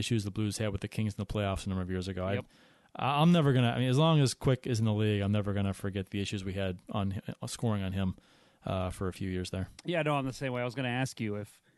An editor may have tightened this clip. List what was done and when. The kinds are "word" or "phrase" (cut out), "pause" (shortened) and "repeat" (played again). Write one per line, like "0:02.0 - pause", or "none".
0:09.8 - pause

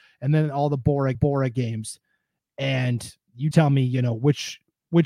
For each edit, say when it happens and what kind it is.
0:01.1 - repeat
0:03.5 - word

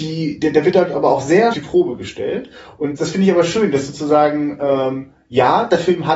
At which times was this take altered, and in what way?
0:01.5 - phrase
0:03.0 - word

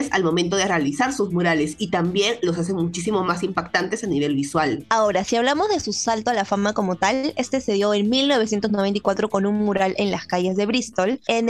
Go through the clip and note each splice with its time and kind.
none

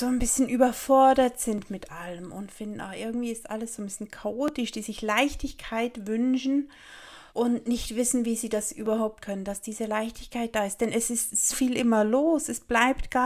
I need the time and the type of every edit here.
0:07.3 - pause
0:09.2 - word
0:11.5 - word

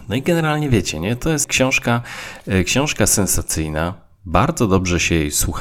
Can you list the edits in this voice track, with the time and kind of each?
0:01.4 - word

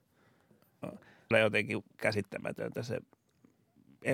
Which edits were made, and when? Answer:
0:01.3 - phrase
0:01.9 - pause

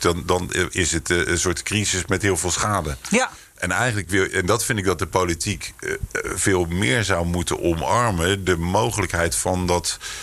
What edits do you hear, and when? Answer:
none

